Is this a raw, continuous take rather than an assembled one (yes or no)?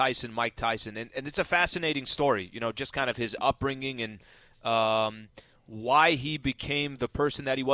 yes